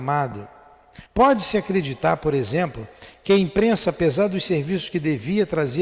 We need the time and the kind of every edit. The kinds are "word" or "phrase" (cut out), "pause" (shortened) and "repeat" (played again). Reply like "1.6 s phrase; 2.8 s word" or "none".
1.1 s pause